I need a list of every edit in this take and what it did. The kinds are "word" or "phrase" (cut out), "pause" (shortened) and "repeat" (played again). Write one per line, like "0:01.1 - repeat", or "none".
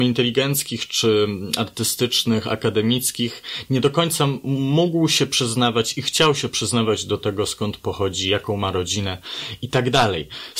none

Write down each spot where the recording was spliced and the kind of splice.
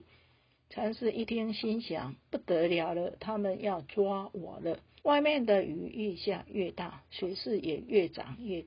0:05.0 - pause

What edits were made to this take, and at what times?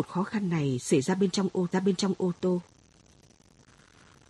0:01.7 - repeat

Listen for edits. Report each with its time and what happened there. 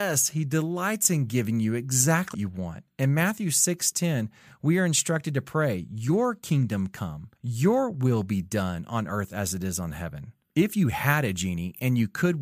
0:02.3 - word
0:07.4 - pause

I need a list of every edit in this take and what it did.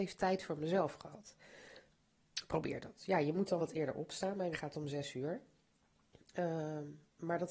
0:03.6 - word
0:04.5 - word

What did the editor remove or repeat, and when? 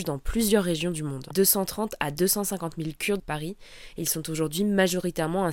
0:01.3 - phrase
0:03.2 - phrase

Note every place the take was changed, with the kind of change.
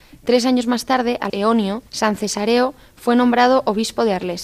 0:01.3 - phrase
0:01.9 - pause

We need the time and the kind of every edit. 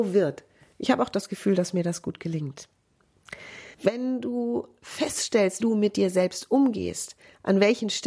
0:03.7 - pause
0:05.6 - word

